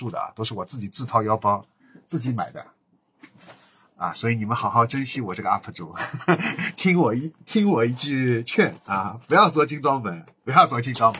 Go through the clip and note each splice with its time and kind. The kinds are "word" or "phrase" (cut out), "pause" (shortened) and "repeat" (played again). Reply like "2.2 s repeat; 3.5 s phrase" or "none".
none